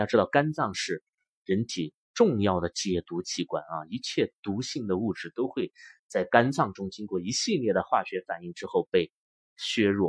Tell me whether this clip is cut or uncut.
uncut